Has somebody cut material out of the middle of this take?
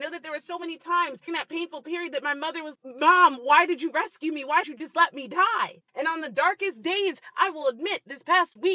yes; 4 cuts; at 1.3 s, 2.7 s, 4.6 s, 5.9 s

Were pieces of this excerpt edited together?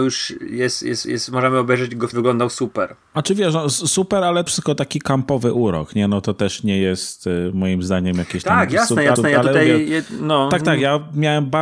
yes; 4 cuts; at 1.0 s, 2.1 s, 4.5 s, 9.2 s

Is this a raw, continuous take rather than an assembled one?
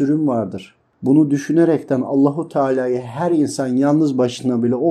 yes; 0 cuts

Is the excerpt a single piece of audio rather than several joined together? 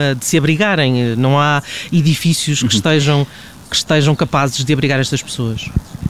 yes; 0 cuts

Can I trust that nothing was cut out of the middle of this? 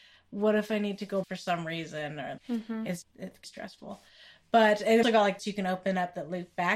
no; 6 cuts; at 1.2 s, 2.4 s, 3.0 s, 3.4 s, 5.0 s, 5.4 s

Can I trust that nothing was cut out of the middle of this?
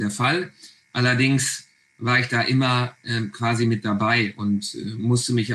yes; 0 cuts

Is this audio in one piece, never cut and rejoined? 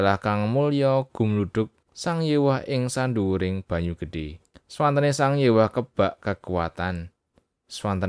no; 2 cuts; at 1.8 s, 4.5 s

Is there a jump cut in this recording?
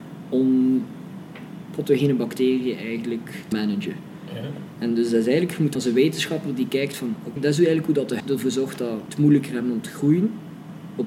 yes; 5 cuts; at 3.5 s, 5.7 s, 7.4 s, 8.2 s, 9.1 s

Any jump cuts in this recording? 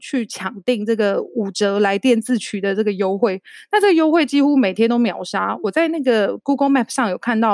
no; 0 cuts

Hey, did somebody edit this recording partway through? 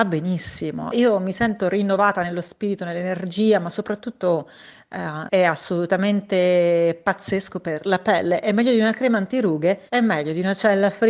yes; 3 cuts; at 0.9 s, 5.3 s, 9.9 s

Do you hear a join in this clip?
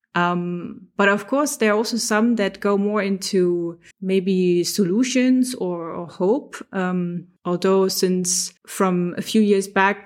yes; 3 cuts; at 3.9 s, 7.4 s, 8.6 s

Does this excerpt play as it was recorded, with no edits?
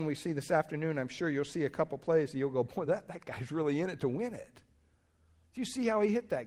yes; 0 cuts

